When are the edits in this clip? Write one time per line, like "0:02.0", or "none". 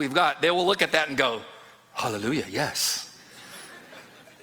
none